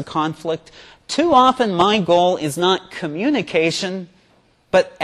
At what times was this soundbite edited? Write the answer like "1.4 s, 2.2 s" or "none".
none